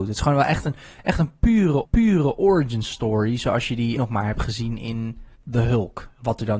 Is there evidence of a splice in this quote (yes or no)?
yes